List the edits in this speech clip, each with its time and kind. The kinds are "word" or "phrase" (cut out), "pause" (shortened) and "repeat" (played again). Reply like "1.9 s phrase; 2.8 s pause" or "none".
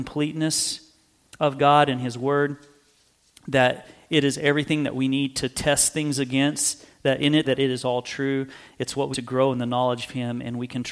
7.4 s phrase; 9.1 s word